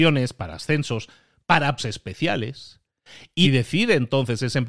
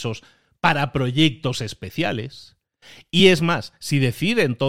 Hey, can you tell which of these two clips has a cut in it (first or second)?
first